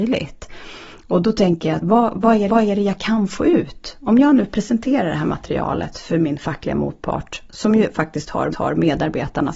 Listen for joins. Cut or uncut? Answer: cut